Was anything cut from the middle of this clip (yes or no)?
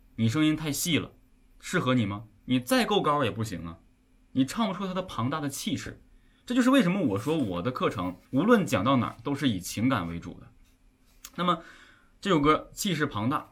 yes